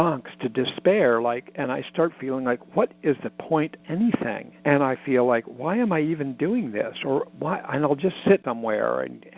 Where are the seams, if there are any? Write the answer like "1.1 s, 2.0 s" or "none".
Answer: 3.8 s, 4.6 s, 8.4 s